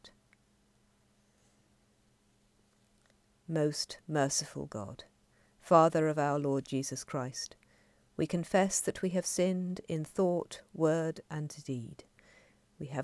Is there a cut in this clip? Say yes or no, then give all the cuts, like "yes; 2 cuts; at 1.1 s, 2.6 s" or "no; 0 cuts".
no; 0 cuts